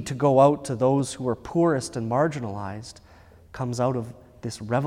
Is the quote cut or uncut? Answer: uncut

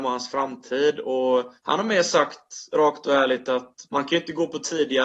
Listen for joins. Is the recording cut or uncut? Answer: cut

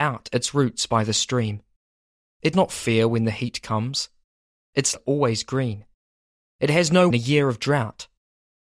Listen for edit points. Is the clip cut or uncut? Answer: cut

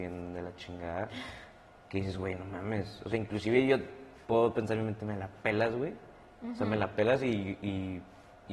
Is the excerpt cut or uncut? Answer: uncut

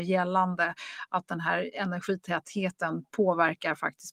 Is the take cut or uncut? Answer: uncut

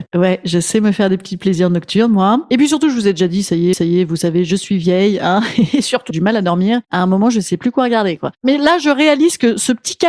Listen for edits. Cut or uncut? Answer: cut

